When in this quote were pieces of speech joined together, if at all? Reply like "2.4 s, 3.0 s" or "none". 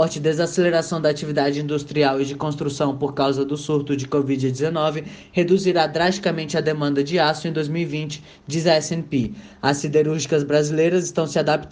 none